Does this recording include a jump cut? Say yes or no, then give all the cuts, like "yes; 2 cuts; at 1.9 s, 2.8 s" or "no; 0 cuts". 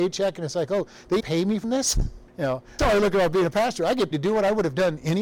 yes; 5 cuts; at 1.2 s, 1.6 s, 2.3 s, 2.8 s, 4.1 s